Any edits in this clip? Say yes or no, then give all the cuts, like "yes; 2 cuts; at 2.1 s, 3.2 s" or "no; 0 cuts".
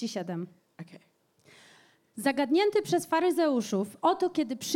no; 0 cuts